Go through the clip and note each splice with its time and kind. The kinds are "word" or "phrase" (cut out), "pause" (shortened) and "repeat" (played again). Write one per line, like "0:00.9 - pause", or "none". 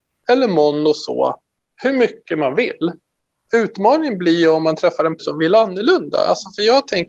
0:05.2 - word